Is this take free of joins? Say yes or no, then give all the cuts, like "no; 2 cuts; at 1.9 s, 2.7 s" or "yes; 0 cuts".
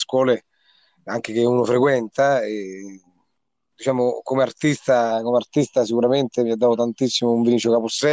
yes; 0 cuts